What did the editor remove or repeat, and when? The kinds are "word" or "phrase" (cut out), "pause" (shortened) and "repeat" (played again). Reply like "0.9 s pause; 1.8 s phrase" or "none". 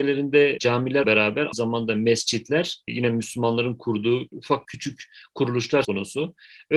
1.0 s word; 1.5 s word; 2.9 s word; 4.6 s word; 5.8 s word